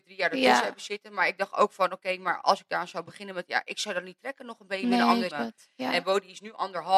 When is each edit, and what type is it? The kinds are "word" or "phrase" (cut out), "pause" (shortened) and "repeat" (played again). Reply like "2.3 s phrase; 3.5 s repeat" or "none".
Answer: 5.3 s word